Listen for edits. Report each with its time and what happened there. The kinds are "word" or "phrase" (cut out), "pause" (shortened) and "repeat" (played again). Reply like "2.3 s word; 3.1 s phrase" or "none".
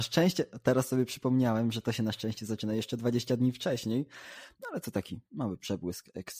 none